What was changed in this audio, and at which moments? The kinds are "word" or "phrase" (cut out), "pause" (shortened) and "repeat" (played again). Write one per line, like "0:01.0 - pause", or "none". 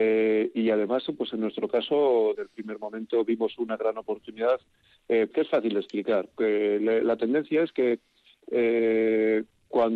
0:02.3 - word
0:05.3 - word
0:06.3 - word
0:07.0 - word